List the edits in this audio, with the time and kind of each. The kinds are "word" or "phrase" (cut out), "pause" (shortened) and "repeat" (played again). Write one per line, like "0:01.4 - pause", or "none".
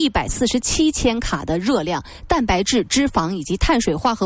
none